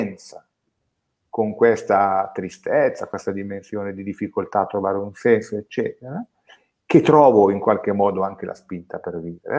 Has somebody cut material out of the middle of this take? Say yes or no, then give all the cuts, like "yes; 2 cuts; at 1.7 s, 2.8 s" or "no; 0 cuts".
no; 0 cuts